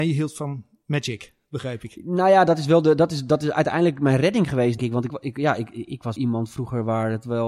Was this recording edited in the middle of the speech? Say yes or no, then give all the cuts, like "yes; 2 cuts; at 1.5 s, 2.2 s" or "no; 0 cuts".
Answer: yes; 3 cuts; at 4.8 s, 5.1 s, 6.2 s